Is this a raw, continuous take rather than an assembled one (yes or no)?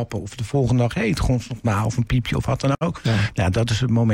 yes